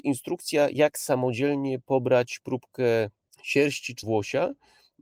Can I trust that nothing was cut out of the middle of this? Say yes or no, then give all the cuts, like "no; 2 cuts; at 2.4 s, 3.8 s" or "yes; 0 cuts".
no; 2 cuts; at 3.3 s, 4.0 s